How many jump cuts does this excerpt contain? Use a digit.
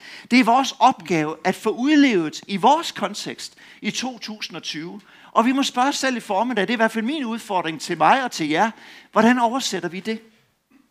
0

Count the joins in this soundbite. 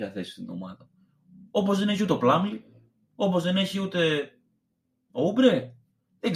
0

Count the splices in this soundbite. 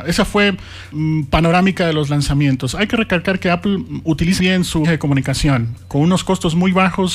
3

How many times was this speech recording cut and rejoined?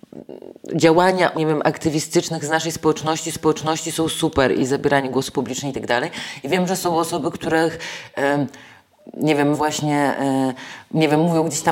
4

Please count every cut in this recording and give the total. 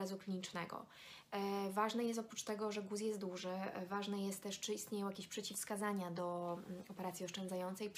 0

